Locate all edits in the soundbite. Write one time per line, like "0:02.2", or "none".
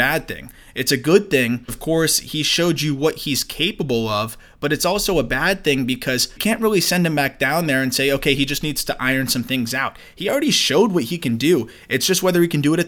0:01.7
0:06.4